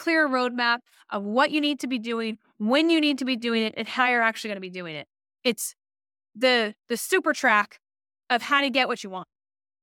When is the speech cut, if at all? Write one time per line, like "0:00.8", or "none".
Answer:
none